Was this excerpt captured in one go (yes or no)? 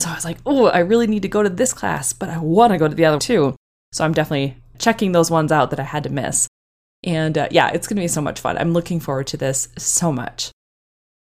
no